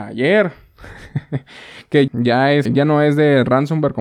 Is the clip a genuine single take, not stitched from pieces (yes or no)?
no